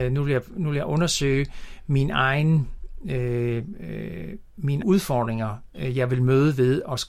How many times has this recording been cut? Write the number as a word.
one